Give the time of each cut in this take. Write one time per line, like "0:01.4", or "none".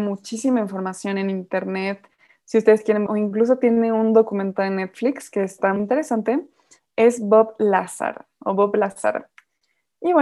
0:03.1
0:05.8